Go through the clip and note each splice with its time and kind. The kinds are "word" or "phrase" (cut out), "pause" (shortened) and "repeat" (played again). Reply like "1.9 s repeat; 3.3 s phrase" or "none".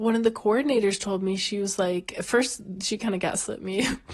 none